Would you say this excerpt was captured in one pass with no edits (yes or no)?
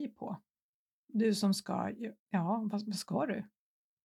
no